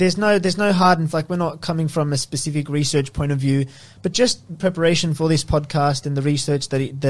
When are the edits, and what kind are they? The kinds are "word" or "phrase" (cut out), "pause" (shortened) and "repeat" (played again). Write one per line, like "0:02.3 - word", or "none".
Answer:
0:01.1 - word
0:04.6 - phrase